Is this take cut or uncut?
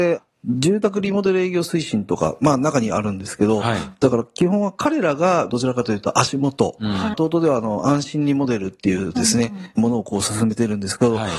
cut